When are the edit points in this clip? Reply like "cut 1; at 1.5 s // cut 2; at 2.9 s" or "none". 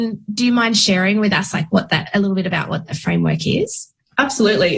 none